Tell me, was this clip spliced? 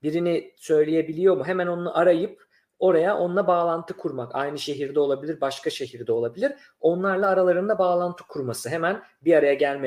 no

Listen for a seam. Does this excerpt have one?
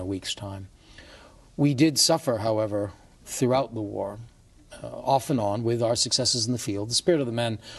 no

